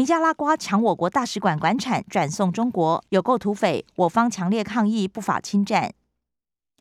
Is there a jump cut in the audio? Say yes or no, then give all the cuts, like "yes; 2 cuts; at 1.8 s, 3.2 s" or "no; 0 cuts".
yes; 1 cut; at 3.1 s